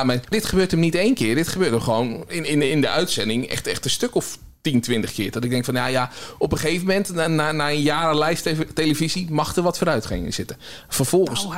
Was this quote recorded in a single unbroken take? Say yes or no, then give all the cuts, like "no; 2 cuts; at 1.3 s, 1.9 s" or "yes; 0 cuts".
yes; 0 cuts